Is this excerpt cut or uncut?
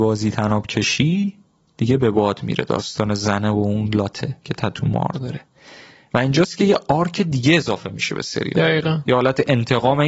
uncut